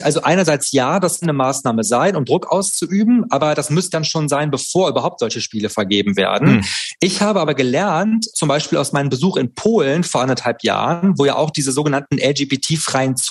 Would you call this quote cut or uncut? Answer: cut